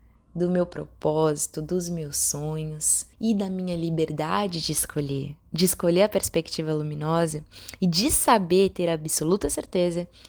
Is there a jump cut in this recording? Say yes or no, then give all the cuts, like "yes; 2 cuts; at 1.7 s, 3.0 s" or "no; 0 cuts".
yes; 1 cut; at 3.1 s